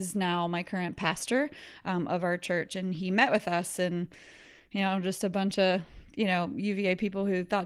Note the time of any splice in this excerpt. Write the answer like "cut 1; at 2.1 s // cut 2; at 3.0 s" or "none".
none